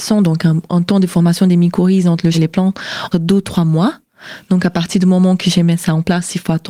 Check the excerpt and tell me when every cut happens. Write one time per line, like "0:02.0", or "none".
0:02.3
0:03.1